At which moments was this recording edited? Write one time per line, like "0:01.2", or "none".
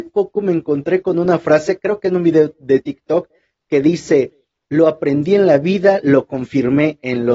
none